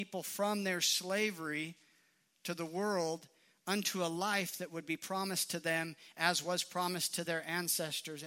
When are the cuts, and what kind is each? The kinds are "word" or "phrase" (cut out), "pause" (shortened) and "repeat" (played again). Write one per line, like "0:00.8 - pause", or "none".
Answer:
none